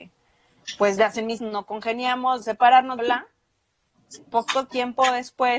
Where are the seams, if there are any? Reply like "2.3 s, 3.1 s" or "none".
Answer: 1.0 s, 1.4 s, 2.4 s, 3.0 s